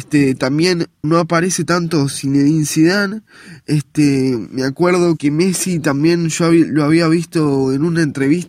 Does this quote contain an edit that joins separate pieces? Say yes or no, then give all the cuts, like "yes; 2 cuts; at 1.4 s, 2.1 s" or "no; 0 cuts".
yes; 2 cuts; at 1.0 s, 5.2 s